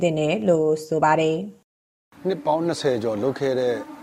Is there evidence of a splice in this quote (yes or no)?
no